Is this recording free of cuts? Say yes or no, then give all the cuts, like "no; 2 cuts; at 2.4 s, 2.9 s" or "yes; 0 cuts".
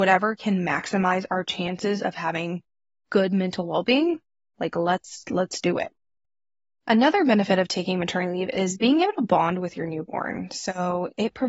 yes; 0 cuts